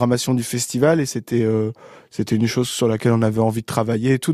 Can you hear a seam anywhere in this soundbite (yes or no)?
no